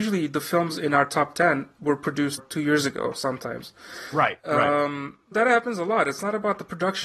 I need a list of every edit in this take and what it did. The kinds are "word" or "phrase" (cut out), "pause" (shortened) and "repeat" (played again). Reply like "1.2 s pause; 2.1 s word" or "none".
2.4 s phrase; 5.3 s word